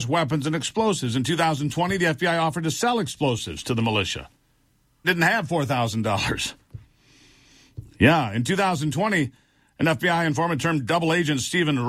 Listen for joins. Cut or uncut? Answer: cut